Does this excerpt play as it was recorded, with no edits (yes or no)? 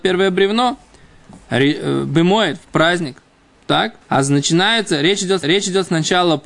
no